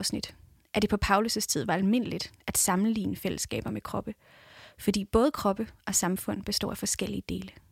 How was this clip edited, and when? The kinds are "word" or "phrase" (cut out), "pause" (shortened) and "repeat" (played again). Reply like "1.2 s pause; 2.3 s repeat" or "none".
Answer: none